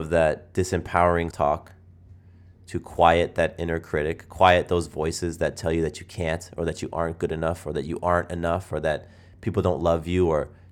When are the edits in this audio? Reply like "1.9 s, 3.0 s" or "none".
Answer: 1.3 s